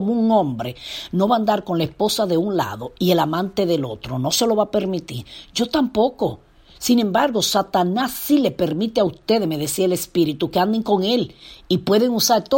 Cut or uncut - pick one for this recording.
uncut